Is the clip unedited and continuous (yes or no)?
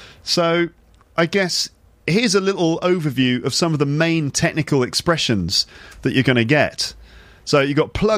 yes